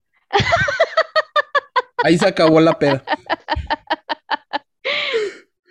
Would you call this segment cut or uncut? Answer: uncut